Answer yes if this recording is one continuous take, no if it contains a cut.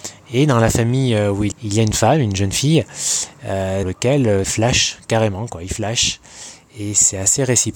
no